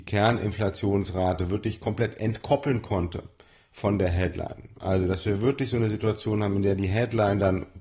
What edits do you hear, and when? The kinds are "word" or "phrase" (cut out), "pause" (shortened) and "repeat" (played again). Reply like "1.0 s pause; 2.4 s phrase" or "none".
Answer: none